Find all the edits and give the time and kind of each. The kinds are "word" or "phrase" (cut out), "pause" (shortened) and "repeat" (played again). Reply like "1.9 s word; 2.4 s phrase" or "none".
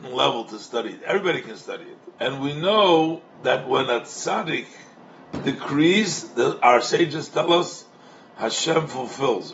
2.2 s pause; 3.3 s pause